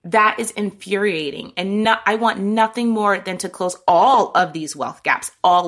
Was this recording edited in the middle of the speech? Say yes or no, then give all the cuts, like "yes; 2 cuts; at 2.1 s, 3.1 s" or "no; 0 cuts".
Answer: no; 0 cuts